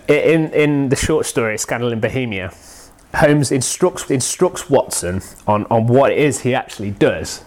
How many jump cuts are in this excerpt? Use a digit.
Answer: 1